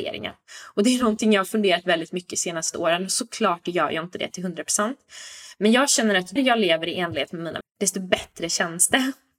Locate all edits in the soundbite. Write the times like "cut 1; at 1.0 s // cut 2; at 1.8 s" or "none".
cut 1; at 6.4 s // cut 2; at 7.6 s